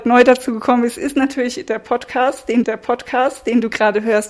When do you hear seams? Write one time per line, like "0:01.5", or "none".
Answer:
0:02.6